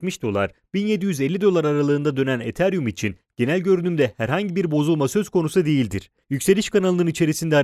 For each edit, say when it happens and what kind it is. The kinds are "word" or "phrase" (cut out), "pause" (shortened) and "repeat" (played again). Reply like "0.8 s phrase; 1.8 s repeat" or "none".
6.2 s pause